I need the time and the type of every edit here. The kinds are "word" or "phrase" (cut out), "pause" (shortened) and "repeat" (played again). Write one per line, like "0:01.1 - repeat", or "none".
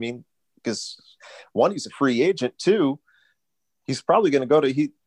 none